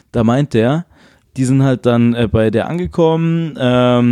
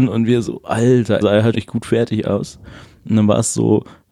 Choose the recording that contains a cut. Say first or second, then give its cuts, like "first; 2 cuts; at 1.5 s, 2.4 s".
second; 2 cuts; at 1.2 s, 1.5 s